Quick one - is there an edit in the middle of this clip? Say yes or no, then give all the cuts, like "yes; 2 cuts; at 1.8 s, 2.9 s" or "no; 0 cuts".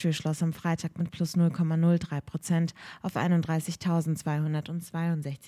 no; 0 cuts